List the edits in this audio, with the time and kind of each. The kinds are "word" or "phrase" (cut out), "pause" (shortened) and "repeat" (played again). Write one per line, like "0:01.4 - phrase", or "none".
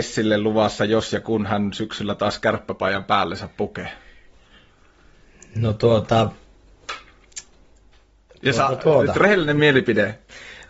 none